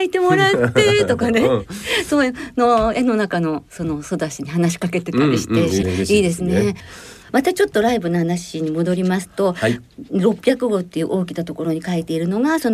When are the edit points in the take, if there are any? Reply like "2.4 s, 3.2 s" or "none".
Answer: 5.8 s